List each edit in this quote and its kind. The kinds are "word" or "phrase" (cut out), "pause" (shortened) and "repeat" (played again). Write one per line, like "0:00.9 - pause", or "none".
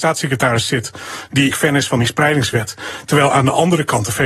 0:01.5 - phrase